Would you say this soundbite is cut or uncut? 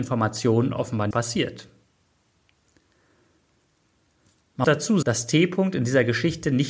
cut